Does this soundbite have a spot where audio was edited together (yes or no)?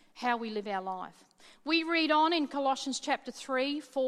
no